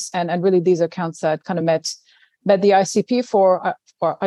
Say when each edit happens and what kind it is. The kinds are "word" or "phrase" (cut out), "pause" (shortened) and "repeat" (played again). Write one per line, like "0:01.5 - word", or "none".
none